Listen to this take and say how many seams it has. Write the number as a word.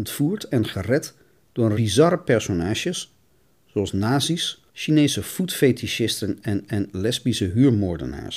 two